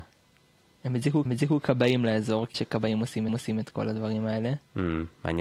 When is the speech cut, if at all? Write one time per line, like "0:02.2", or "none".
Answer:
0:01.3
0:02.5
0:03.3